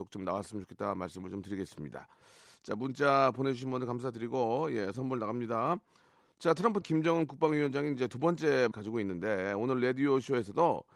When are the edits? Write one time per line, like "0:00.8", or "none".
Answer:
0:04.9
0:06.8
0:08.7